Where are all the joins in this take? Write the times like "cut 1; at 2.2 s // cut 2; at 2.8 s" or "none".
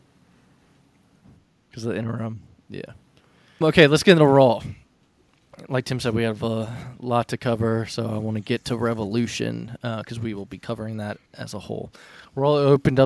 cut 1; at 3.6 s